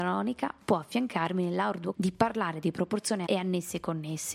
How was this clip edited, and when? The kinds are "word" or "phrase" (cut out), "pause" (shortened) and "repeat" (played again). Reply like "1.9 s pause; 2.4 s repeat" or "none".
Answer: 1.9 s word; 3.3 s word